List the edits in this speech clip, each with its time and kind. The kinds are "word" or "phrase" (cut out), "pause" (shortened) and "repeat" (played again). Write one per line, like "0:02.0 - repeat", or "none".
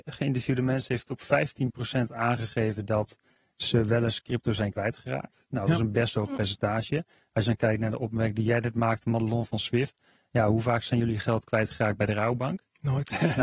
none